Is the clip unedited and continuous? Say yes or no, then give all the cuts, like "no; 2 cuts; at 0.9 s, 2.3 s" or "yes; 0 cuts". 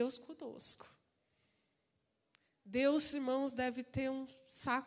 yes; 0 cuts